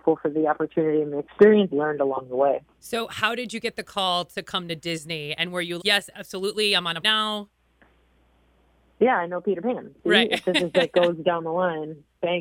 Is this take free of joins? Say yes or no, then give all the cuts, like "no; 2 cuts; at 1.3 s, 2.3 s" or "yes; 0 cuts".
no; 4 cuts; at 1.7 s, 2.7 s, 5.8 s, 7.0 s